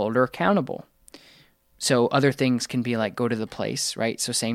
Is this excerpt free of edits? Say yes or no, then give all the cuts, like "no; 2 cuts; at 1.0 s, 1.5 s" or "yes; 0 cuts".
yes; 0 cuts